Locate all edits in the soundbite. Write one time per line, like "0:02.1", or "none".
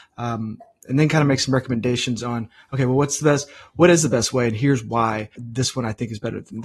0:05.4